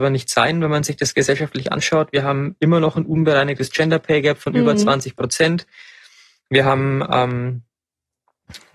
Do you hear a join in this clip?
no; 0 cuts

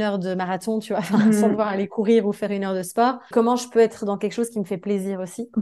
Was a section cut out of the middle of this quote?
yes; 1 cut; at 3.3 s

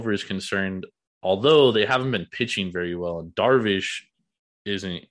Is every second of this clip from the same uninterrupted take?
yes; 0 cuts

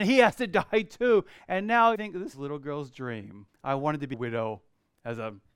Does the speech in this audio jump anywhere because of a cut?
yes; 4 cuts; at 2.0 s, 2.3 s, 3.5 s, 4.1 s

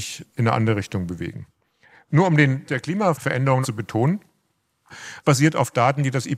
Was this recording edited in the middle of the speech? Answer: yes; 3 cuts; at 2.6 s, 3.6 s, 5.2 s

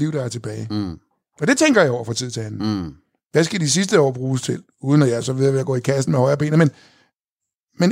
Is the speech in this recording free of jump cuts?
yes; 0 cuts

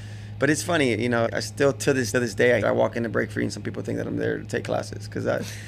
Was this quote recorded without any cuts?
no; 3 cuts; at 1.3 s, 2.1 s, 2.6 s

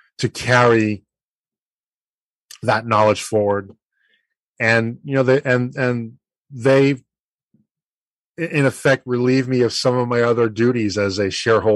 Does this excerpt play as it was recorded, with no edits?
yes; 0 cuts

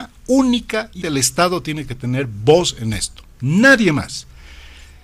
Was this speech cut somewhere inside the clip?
yes; 1 cut; at 1.0 s

